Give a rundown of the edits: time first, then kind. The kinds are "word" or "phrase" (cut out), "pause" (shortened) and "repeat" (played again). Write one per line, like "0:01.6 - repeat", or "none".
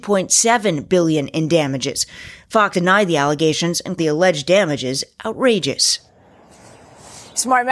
0:02.7 - word
0:04.0 - word